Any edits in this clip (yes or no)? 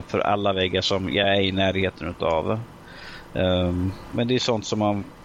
no